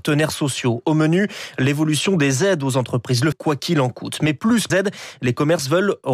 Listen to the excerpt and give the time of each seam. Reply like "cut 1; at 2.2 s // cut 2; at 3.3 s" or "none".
cut 1; at 3.3 s // cut 2; at 4.7 s